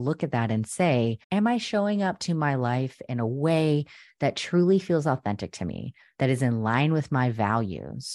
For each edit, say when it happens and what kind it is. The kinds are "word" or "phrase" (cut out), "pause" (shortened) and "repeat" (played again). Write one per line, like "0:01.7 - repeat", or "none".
0:01.2 - pause